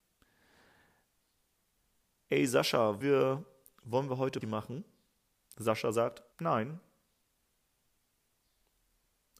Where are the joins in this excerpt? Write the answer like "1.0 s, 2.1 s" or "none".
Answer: 3.0 s, 4.4 s, 6.3 s